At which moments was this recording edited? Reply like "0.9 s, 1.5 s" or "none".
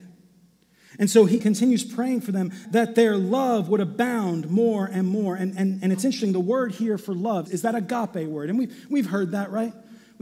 1.4 s, 2.6 s, 7.5 s